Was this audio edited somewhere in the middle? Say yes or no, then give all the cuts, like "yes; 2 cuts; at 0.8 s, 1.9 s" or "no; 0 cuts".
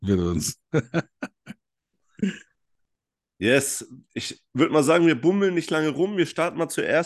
no; 0 cuts